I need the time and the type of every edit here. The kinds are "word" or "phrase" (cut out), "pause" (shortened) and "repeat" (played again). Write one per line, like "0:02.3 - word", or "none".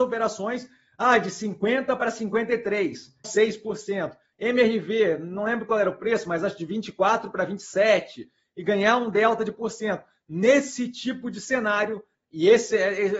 0:03.2 - phrase